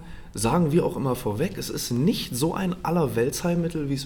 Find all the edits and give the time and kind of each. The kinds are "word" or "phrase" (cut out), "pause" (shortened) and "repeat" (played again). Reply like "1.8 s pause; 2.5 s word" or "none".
none